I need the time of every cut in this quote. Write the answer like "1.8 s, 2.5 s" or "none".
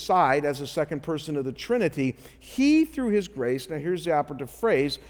none